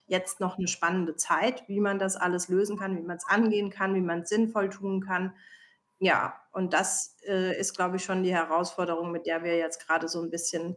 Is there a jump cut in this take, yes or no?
no